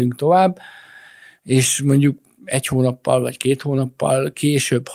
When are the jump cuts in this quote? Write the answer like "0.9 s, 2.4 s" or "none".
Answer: none